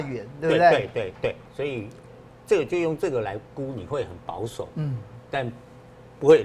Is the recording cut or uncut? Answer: uncut